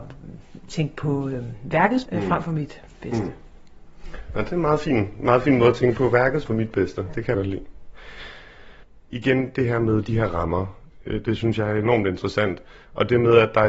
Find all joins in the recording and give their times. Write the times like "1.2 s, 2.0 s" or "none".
2.1 s, 6.5 s, 7.3 s